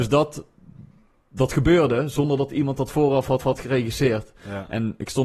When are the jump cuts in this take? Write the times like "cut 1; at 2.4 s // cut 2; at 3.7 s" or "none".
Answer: cut 1; at 3.4 s